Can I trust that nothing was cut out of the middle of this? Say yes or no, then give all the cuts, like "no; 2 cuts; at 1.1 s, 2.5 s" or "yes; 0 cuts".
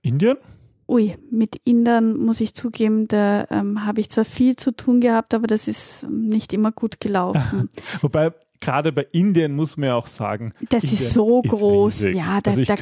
no; 1 cut; at 1.2 s